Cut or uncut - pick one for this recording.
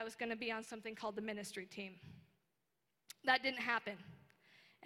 uncut